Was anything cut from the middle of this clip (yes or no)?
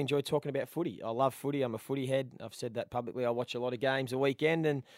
no